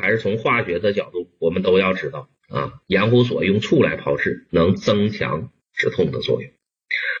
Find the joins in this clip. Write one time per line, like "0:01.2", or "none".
0:02.4
0:05.6